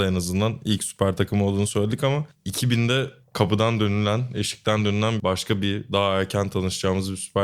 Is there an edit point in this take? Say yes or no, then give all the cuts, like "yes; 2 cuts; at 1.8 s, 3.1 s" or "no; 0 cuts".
no; 0 cuts